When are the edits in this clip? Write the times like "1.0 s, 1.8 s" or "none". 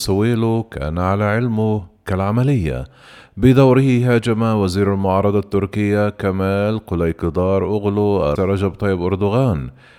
2.1 s, 8.4 s